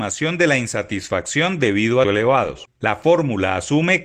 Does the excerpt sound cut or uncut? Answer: cut